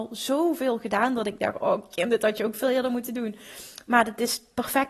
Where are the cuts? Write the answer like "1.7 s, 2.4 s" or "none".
none